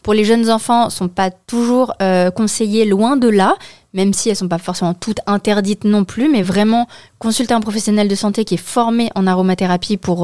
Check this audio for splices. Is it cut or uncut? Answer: uncut